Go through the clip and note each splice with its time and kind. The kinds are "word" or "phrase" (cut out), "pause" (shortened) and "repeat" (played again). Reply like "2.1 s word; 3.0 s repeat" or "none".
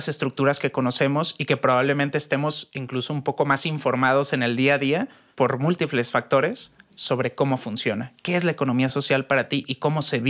none